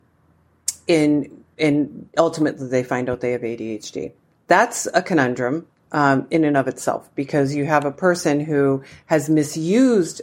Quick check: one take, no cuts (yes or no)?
yes